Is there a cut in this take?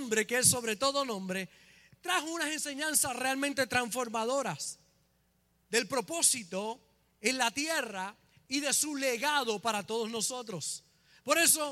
no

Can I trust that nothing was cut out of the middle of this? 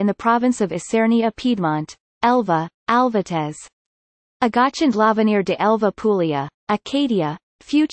yes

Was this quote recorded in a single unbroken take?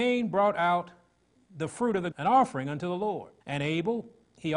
no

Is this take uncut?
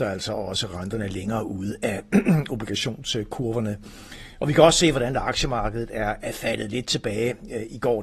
yes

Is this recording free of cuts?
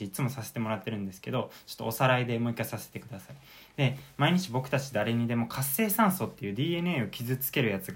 yes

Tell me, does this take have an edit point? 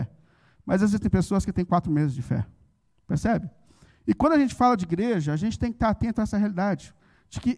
no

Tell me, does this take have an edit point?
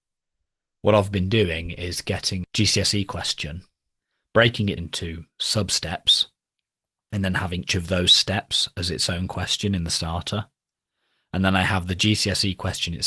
yes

